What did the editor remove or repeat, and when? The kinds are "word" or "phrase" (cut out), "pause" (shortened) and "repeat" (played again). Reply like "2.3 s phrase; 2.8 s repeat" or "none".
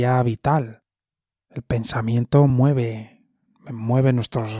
none